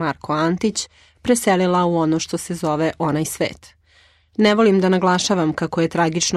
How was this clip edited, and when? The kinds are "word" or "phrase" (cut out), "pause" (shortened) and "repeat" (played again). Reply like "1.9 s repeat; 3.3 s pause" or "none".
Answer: none